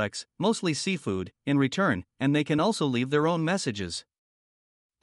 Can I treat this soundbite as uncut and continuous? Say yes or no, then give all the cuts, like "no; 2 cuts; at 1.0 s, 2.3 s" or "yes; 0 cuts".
yes; 0 cuts